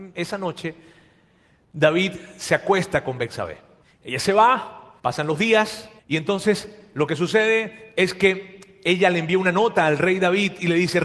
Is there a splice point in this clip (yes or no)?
yes